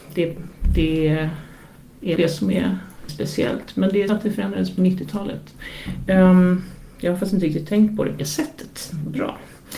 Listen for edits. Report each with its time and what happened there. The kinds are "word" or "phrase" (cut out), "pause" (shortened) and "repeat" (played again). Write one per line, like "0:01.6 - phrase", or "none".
0:02.2 - word
0:03.1 - word
0:04.1 - word
0:08.2 - word